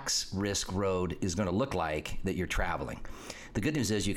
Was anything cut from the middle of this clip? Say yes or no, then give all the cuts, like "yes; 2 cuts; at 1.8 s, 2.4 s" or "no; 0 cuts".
no; 0 cuts